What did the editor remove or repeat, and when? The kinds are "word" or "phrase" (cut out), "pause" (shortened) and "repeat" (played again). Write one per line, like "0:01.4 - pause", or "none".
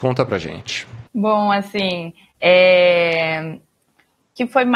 0:01.1 - pause